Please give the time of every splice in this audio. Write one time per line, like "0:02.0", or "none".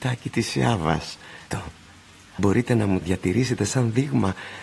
0:01.5
0:02.4
0:03.0

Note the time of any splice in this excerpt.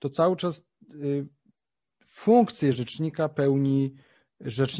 none

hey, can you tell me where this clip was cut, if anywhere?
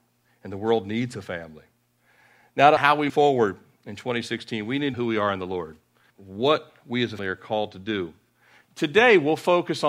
0:02.8
0:03.1
0:04.9
0:06.1
0:07.2

